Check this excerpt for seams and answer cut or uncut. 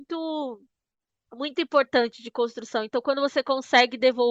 uncut